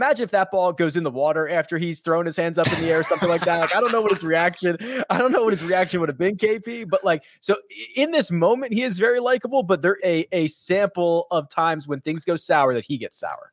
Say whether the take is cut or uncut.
cut